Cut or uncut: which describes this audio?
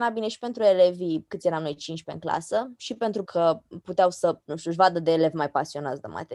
cut